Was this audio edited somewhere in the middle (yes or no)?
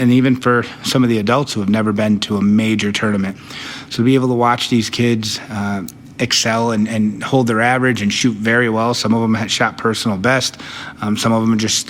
no